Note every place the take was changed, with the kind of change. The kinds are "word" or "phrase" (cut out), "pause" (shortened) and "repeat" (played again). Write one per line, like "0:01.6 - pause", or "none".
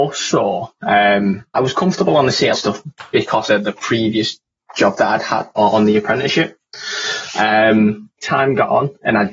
0:01.5 - word
0:02.5 - word
0:03.5 - word
0:05.6 - word
0:08.2 - word